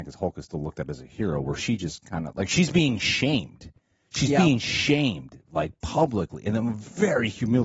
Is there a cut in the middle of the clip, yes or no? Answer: no